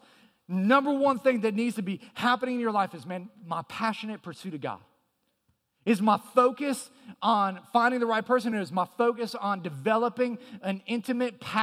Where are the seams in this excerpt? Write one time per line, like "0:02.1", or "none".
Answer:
none